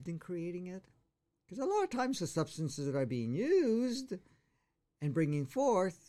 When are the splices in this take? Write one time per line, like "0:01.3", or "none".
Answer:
none

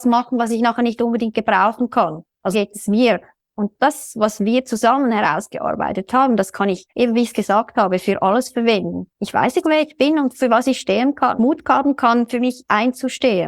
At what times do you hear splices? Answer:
0:02.5
0:03.8
0:06.9
0:09.1
0:09.6
0:11.4

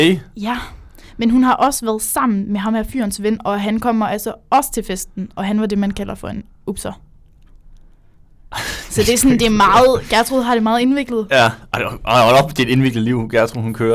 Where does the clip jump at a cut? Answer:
none

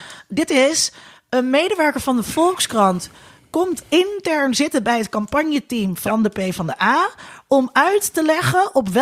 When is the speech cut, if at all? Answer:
none

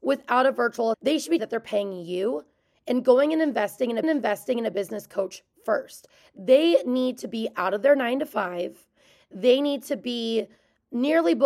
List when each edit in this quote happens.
0:00.9
0:01.4
0:04.0

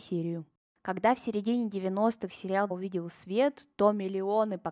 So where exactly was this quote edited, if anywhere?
0:02.7

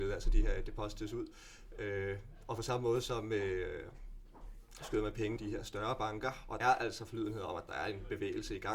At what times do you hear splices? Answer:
0:05.4
0:06.6

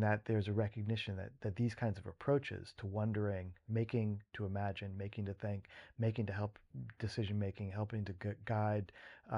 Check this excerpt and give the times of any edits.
none

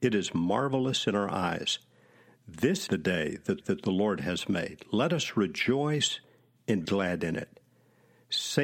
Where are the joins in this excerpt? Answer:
0:02.9
0:03.6
0:06.9

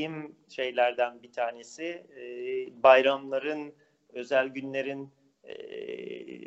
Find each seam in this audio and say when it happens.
none

